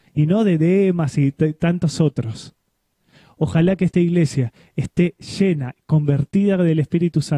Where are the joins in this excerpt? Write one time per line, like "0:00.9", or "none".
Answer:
none